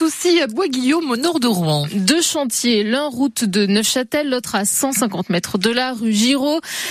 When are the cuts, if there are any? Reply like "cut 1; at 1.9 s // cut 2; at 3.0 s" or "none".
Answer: none